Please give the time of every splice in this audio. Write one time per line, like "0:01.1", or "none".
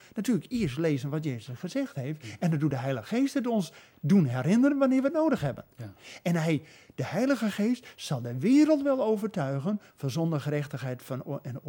none